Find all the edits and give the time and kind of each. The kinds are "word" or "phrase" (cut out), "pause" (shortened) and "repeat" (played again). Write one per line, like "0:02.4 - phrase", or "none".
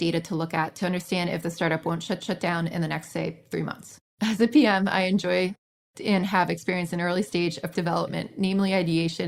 0:02.2 - repeat
0:04.1 - pause
0:07.7 - word